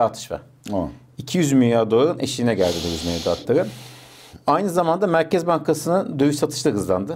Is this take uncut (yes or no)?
yes